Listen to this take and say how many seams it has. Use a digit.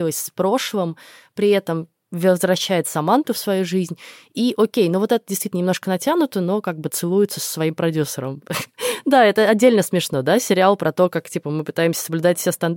0